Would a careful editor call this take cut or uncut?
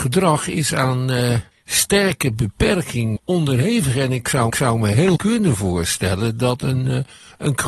cut